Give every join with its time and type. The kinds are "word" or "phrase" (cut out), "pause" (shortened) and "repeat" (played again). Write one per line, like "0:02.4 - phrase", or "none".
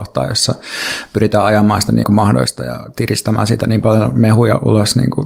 0:02.0 - word